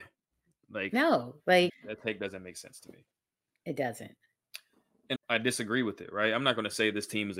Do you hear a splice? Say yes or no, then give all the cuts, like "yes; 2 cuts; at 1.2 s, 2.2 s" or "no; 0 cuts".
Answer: yes; 2 cuts; at 1.7 s, 5.2 s